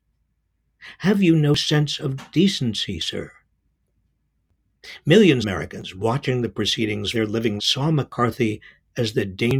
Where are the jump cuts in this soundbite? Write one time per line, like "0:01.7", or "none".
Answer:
0:05.4
0:07.1
0:07.6